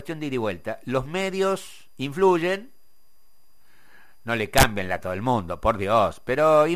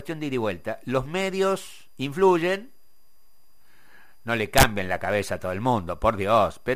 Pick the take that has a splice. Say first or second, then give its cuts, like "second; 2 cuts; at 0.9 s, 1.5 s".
first; 1 cut; at 5.0 s